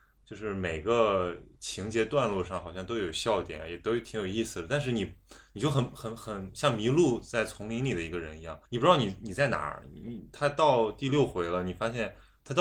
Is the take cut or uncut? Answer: cut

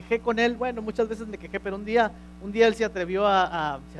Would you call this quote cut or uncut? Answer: uncut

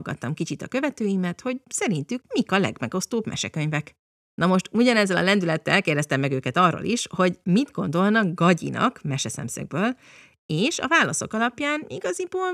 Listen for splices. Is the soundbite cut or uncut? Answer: uncut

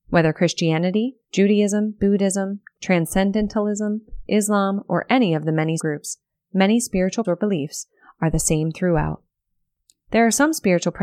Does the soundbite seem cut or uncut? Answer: cut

